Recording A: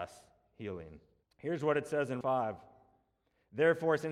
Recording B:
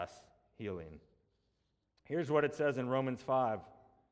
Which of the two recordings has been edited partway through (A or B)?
A